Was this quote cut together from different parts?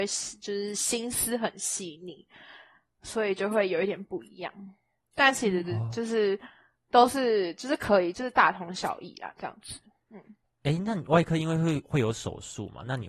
no; 0 cuts

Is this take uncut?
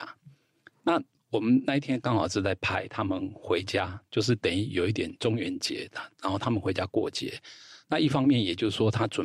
yes; 0 cuts

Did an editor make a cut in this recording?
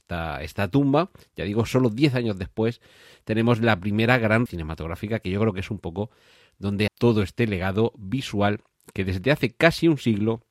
yes; 2 cuts; at 4.5 s, 6.9 s

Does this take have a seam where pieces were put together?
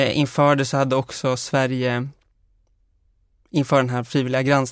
no; 0 cuts

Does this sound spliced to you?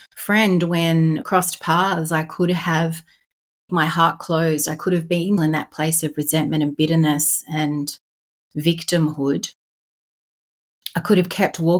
yes; 3 cuts; at 1.2 s, 3.7 s, 5.4 s

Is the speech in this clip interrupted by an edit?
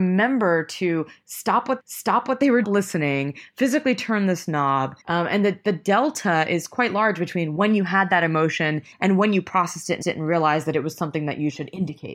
yes; 4 cuts; at 1.8 s, 2.6 s, 5.0 s, 10.0 s

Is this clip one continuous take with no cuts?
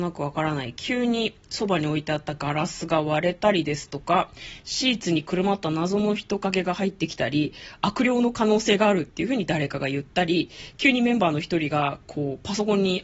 no; 1 cut; at 1.4 s

